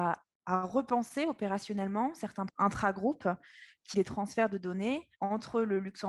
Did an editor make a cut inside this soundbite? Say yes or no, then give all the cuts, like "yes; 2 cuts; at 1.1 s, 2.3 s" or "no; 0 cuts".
yes; 3 cuts; at 2.5 s, 3.9 s, 5.1 s